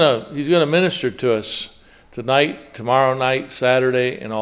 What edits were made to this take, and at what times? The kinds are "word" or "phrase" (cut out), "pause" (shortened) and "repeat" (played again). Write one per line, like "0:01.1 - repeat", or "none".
none